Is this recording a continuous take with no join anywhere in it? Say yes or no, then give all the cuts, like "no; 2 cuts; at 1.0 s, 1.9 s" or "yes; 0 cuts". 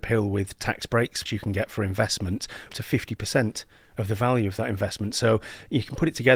no; 2 cuts; at 1.3 s, 2.7 s